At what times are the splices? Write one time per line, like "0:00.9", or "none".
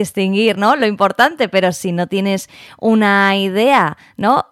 none